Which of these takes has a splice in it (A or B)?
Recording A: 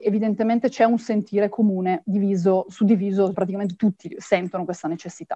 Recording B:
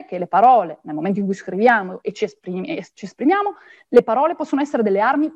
A